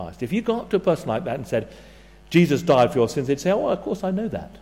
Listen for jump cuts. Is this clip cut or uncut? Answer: uncut